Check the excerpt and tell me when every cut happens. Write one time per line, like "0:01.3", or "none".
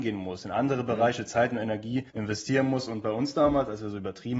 0:02.1